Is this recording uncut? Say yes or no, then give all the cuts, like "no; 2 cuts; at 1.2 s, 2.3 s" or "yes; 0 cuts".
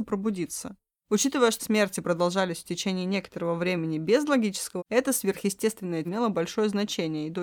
no; 3 cuts; at 1.6 s, 4.8 s, 6.0 s